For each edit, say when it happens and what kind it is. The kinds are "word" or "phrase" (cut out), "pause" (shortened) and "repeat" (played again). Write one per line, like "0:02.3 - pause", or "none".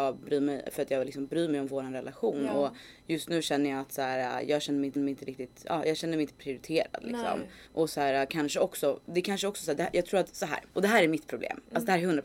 0:05.0 - repeat
0:07.7 - pause
0:10.7 - pause